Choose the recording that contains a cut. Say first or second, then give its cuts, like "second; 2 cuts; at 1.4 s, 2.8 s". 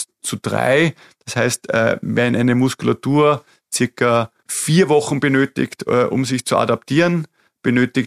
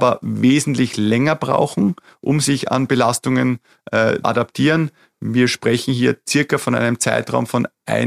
second; 1 cut; at 4.2 s